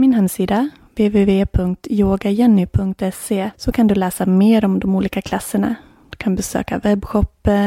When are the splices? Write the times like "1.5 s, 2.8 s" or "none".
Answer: none